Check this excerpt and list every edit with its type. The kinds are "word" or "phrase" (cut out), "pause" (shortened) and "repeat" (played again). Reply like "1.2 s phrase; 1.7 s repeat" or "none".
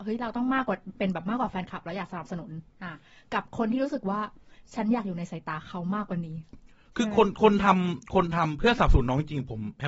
none